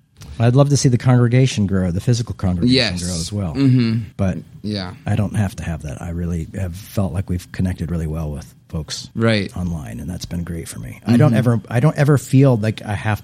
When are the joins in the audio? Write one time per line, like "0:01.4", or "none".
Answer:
0:04.1
0:09.1